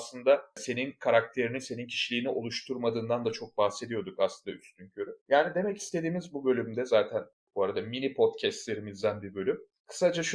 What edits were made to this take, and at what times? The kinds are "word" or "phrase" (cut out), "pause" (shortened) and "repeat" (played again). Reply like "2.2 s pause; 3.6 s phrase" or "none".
5.2 s pause